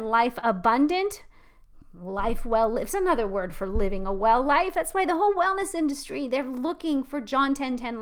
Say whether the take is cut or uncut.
uncut